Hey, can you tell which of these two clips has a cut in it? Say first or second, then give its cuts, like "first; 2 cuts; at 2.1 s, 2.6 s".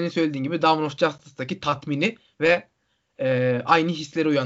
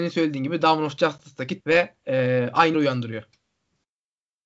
second; 3 cuts; at 1.6 s, 2.0 s, 2.7 s